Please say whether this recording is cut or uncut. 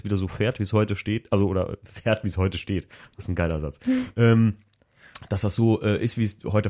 uncut